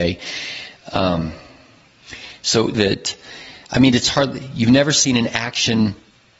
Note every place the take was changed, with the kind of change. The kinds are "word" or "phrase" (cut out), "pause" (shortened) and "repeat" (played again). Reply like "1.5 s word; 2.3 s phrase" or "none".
2.7 s phrase